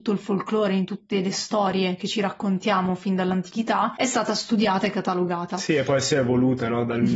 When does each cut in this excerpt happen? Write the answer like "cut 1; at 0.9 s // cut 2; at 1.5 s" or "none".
none